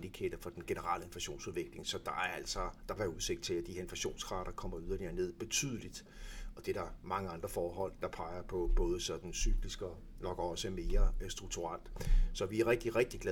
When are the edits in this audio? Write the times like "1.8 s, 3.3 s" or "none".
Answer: 3.0 s, 8.0 s

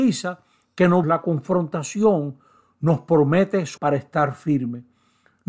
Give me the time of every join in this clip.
1.0 s, 3.8 s

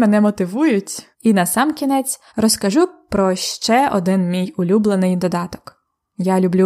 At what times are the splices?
1.1 s, 2.3 s

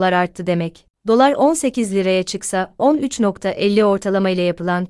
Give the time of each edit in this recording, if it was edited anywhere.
none

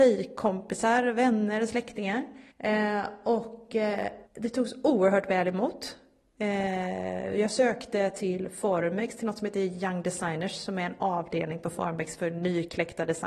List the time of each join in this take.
2.5 s, 4.3 s

